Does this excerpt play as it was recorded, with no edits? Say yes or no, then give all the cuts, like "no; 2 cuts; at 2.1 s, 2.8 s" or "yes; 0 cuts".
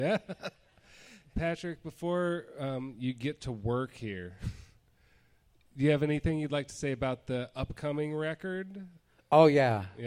yes; 0 cuts